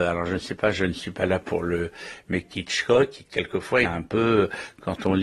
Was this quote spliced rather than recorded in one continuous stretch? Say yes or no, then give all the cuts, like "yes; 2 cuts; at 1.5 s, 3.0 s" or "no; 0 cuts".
yes; 1 cut; at 3.8 s